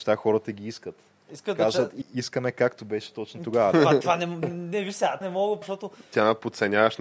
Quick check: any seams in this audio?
yes; 4 cuts; at 2.0 s, 4.4 s, 5.2 s, 5.6 s

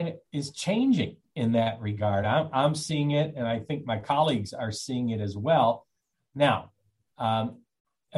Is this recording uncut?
yes; 0 cuts

